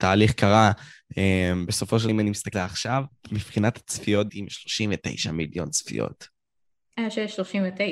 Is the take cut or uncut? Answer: cut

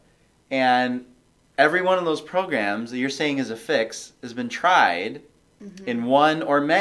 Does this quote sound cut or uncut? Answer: uncut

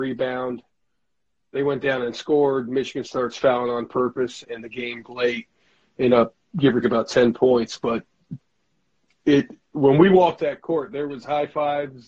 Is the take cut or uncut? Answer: cut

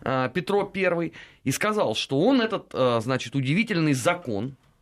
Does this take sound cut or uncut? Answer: uncut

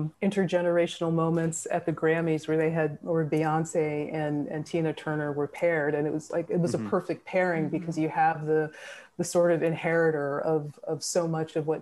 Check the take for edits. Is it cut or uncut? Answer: uncut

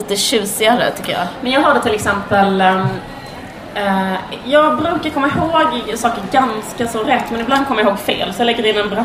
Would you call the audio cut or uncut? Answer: uncut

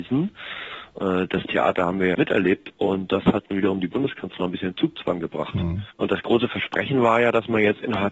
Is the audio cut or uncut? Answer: cut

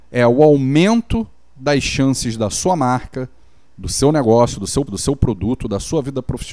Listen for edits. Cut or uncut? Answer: cut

